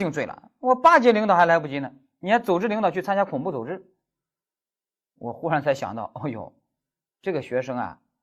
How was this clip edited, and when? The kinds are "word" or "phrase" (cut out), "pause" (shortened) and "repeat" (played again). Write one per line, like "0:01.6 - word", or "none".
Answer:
none